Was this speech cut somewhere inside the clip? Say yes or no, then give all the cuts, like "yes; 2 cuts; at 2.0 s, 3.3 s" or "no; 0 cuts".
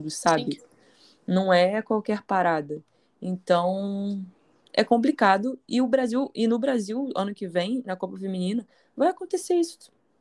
no; 0 cuts